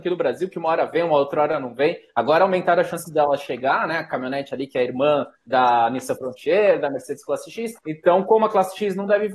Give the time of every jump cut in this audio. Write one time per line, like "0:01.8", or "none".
0:05.4
0:07.8